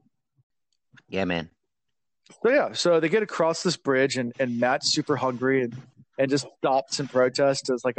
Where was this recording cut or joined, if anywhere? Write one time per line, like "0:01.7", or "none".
none